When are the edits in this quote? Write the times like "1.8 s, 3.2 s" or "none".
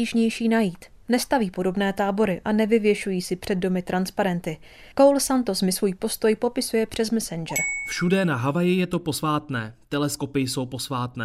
4.9 s